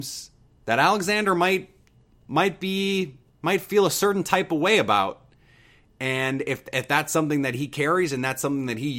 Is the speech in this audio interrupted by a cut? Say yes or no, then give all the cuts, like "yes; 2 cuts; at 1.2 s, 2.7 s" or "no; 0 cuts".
no; 0 cuts